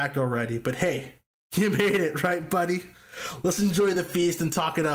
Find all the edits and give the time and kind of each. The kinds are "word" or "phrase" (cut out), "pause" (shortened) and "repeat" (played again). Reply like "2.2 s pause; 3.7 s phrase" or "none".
none

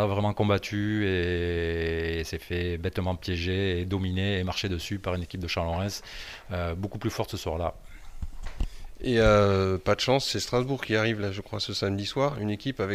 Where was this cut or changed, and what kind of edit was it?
none

